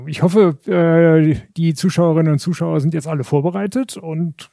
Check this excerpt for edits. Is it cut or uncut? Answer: uncut